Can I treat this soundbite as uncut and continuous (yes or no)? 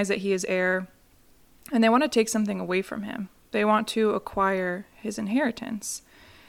yes